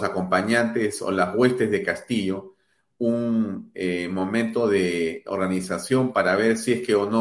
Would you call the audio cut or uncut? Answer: uncut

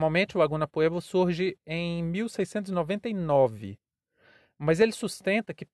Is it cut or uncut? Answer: uncut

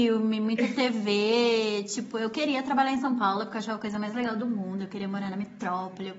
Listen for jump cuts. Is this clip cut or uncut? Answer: uncut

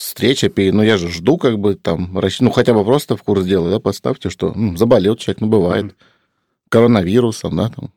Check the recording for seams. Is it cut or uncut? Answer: uncut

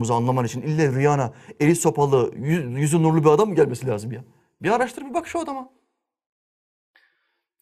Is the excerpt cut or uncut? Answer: uncut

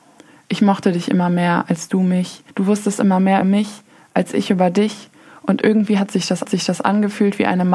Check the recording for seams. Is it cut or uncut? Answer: cut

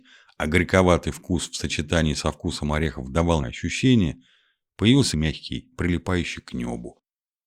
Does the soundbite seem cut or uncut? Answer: cut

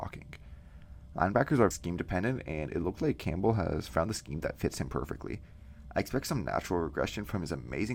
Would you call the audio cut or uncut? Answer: cut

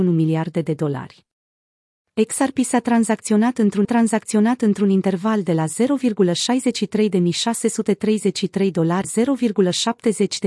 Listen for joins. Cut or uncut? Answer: cut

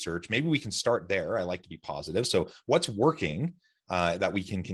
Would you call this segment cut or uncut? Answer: uncut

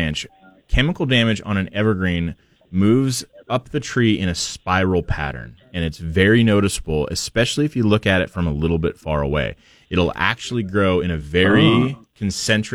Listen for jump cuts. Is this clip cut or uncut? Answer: uncut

